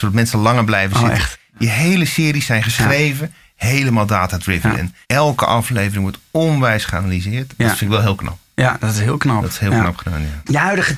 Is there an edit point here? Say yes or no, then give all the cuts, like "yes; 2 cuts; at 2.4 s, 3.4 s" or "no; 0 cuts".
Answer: yes; 1 cut; at 5.0 s